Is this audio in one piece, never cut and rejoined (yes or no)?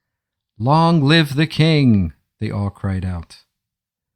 yes